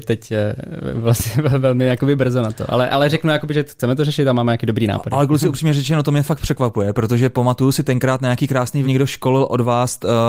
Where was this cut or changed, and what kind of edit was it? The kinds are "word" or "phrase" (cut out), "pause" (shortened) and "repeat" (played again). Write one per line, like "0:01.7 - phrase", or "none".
0:08.8 - word